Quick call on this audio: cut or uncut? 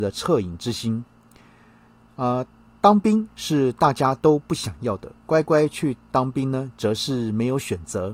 uncut